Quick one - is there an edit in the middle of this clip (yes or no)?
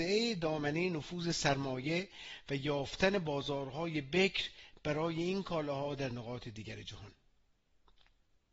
no